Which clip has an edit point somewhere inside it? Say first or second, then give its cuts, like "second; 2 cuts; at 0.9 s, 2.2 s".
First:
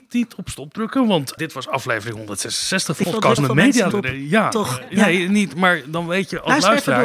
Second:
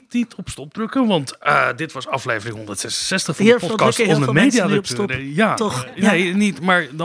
first; 4 cuts; at 1.4 s, 3.0 s, 3.4 s, 3.9 s